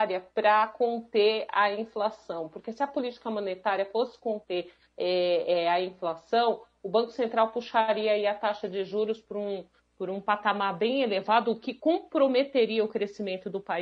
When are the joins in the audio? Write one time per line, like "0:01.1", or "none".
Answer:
none